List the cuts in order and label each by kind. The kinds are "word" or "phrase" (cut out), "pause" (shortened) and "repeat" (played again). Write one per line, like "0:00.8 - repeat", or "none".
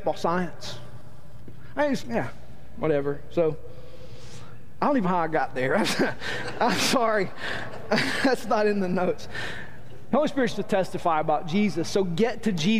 0:02.0 - word
0:05.0 - word
0:10.5 - word